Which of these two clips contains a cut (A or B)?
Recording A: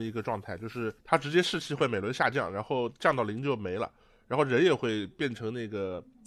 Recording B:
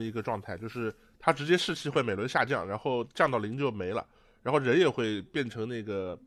A